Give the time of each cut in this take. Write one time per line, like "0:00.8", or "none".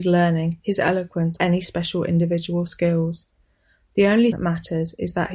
0:01.4
0:04.3